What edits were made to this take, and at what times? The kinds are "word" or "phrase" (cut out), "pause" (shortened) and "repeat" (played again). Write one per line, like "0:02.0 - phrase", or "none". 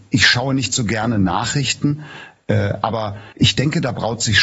0:03.3 - pause